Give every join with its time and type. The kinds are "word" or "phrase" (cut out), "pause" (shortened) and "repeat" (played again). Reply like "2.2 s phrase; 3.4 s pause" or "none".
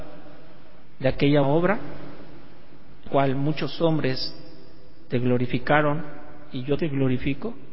1.4 s word; 3.1 s word; 6.8 s word